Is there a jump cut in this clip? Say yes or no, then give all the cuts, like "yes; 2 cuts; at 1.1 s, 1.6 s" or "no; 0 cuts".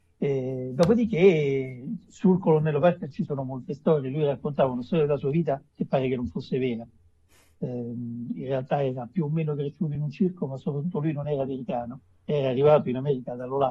no; 0 cuts